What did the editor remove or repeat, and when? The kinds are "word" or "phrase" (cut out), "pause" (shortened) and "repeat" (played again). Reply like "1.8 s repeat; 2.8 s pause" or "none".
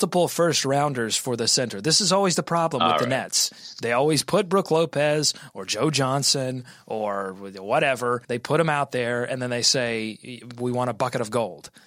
8.2 s pause